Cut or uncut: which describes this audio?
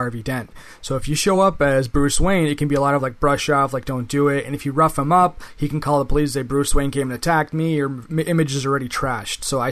uncut